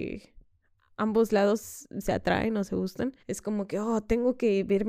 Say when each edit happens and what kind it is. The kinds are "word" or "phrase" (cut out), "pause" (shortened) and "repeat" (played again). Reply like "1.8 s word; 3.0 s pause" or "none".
3.2 s pause

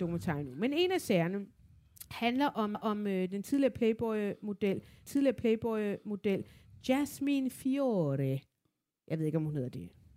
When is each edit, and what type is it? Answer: 2.7 s repeat; 5.1 s repeat

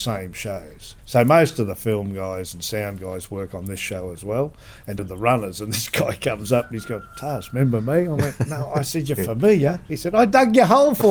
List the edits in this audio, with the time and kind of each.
1.0 s pause; 5.0 s word

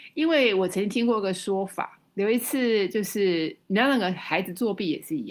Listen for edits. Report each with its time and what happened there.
3.6 s pause

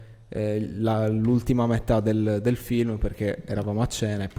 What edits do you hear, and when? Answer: none

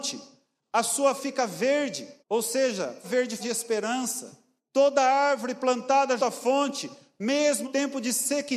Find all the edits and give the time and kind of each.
1.2 s word; 2.2 s pause; 3.0 s word; 3.4 s word; 4.6 s pause; 6.2 s word; 7.6 s word

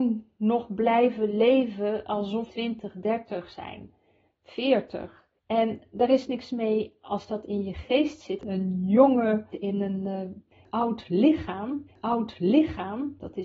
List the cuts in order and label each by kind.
2.5 s word; 5.4 s pause; 6.5 s word; 9.5 s word; 11.9 s repeat

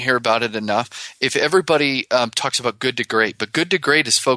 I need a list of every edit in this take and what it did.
none

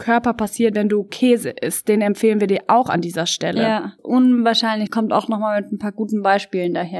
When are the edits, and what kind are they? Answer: 4.0 s phrase; 4.9 s phrase

